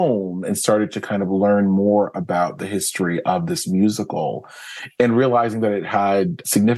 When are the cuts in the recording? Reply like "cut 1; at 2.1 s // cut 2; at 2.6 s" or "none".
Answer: none